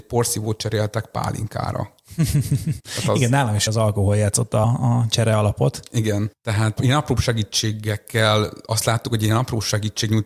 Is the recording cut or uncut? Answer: cut